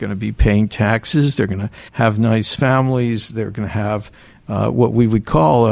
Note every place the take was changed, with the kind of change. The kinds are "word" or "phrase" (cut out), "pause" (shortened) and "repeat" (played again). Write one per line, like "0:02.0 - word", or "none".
0:01.9 - pause